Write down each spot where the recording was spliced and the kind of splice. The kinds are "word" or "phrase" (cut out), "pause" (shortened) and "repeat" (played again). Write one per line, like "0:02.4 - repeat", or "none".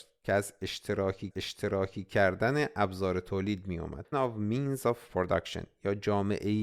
0:01.3 - repeat
0:04.1 - word